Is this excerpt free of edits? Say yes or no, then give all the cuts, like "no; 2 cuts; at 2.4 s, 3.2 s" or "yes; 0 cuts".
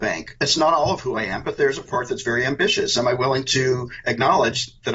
yes; 0 cuts